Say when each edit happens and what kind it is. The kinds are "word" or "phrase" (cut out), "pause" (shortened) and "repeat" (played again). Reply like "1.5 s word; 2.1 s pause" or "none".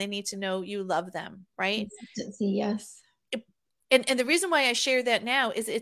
none